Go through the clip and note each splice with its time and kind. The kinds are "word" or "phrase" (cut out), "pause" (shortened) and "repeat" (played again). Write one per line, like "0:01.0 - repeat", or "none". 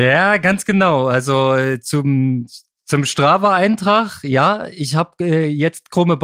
none